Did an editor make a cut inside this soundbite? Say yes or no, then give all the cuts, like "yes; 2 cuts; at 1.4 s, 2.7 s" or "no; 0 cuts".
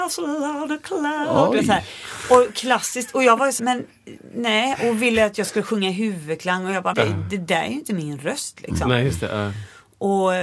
yes; 2 cuts; at 3.6 s, 6.9 s